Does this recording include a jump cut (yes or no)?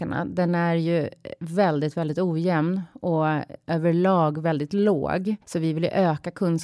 yes